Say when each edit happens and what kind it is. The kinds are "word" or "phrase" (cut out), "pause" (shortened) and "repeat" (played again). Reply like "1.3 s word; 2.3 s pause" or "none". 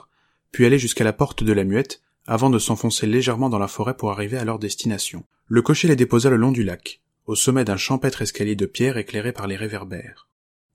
5.3 s pause